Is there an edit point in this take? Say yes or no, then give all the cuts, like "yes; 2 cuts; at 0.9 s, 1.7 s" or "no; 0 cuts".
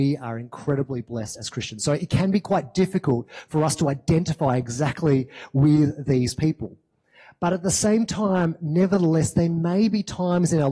no; 0 cuts